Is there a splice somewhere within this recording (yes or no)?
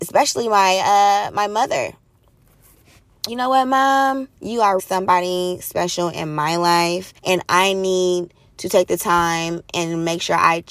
yes